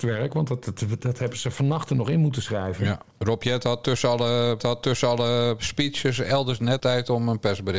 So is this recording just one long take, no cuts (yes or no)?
no